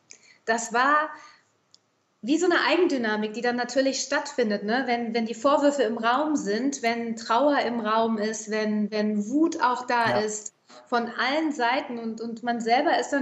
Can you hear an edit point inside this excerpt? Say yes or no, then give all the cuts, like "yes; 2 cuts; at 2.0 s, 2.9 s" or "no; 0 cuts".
no; 0 cuts